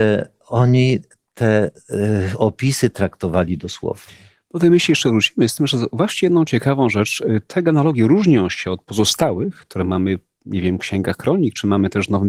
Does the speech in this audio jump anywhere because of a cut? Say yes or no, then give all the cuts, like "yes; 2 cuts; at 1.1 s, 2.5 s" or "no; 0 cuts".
no; 0 cuts